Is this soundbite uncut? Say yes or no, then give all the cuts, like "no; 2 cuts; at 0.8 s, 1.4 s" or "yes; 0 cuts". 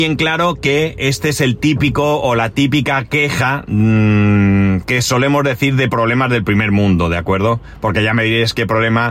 yes; 0 cuts